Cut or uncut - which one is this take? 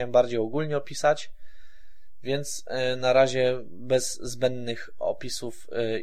uncut